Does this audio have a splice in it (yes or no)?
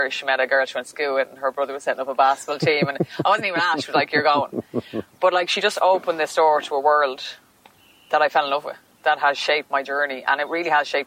yes